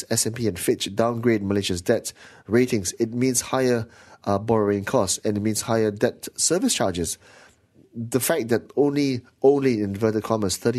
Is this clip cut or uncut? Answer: uncut